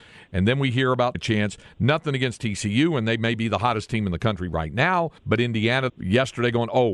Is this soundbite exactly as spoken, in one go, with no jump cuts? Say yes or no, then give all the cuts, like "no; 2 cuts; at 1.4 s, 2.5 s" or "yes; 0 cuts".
no; 3 cuts; at 1.1 s, 5.2 s, 5.9 s